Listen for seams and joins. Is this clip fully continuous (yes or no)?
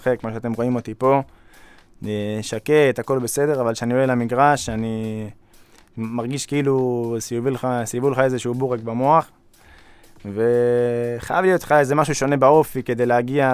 yes